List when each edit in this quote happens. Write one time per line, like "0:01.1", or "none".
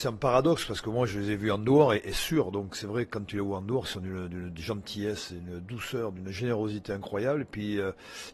none